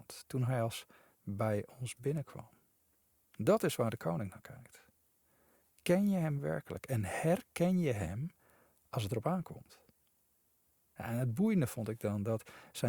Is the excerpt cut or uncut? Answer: cut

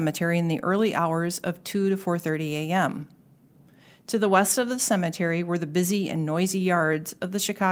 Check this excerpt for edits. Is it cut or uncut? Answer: uncut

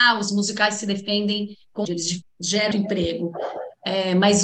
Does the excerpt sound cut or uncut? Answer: cut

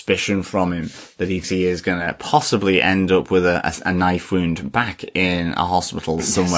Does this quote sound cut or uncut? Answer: cut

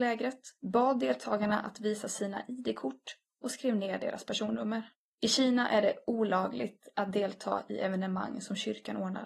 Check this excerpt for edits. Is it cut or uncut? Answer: cut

